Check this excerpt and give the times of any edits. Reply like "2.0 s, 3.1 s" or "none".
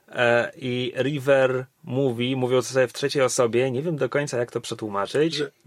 none